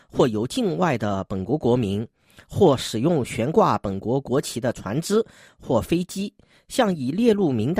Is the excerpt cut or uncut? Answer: uncut